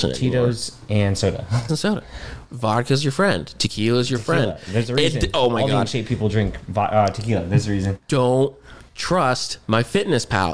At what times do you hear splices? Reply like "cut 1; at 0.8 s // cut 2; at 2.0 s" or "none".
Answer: cut 1; at 1.7 s